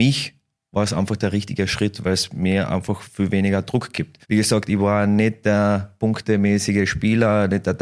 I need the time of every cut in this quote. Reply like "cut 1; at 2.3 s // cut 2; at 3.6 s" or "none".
cut 1; at 4.2 s